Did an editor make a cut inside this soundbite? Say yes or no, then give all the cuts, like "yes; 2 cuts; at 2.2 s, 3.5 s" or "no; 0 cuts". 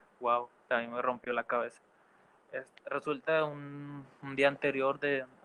no; 0 cuts